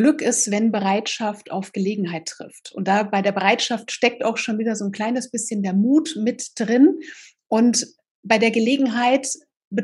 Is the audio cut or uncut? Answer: uncut